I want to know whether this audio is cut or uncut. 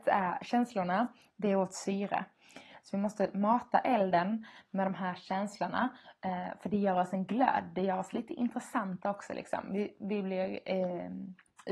uncut